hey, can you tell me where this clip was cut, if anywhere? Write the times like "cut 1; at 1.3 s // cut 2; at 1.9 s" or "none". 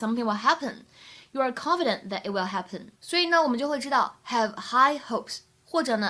cut 1; at 2.9 s

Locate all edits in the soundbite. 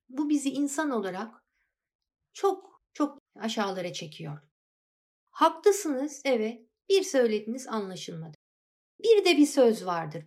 none

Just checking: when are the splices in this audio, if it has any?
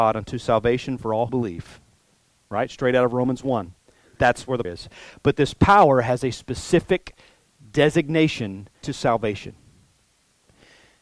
cut 1; at 1.3 s // cut 2; at 4.6 s // cut 3; at 8.8 s

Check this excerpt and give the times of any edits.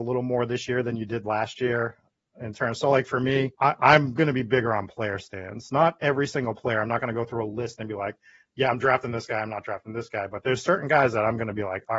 cut 1; at 3.5 s

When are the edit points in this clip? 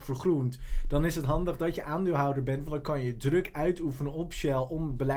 none

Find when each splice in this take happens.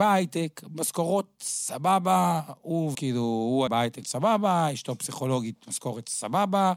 cut 1; at 2.9 s // cut 2; at 3.7 s // cut 3; at 4.0 s

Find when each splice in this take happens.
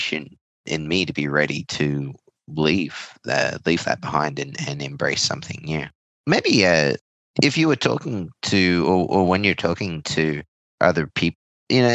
none

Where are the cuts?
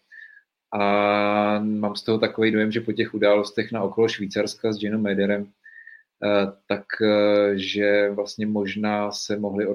none

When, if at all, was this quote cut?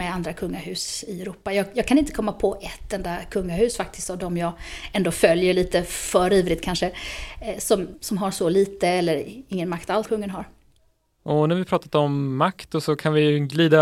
cut 1; at 7.9 s // cut 2; at 10.0 s

